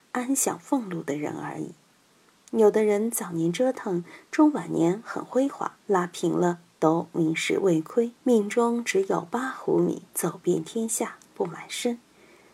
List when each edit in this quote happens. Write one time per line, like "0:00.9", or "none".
0:05.8
0:08.2
0:10.1